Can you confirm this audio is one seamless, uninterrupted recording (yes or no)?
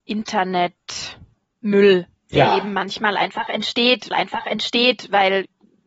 no